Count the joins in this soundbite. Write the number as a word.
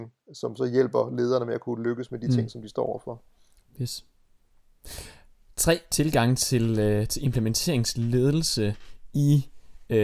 zero